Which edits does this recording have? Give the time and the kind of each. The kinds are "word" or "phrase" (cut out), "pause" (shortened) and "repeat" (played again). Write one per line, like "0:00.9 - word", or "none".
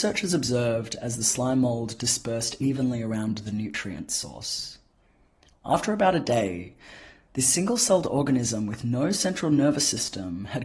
none